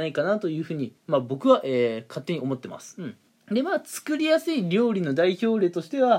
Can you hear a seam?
yes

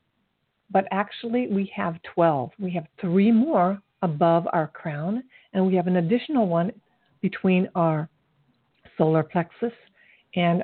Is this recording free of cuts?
yes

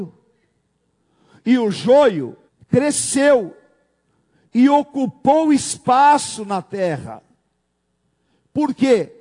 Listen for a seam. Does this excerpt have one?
yes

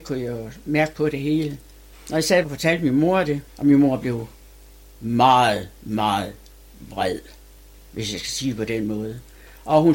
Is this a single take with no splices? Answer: no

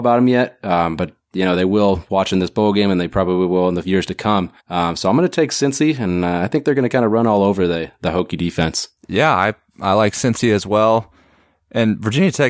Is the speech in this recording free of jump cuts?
no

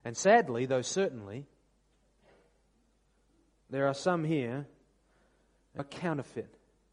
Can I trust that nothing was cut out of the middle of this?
no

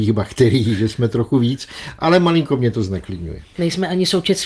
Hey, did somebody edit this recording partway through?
no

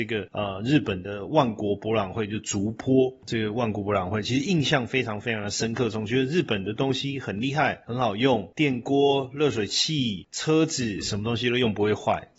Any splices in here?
no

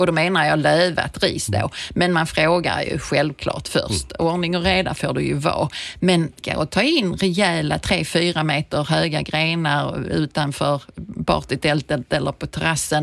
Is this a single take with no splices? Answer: no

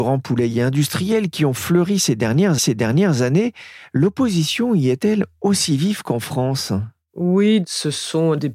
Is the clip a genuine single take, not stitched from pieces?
no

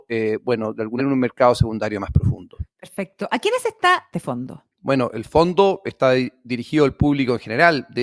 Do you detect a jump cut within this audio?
yes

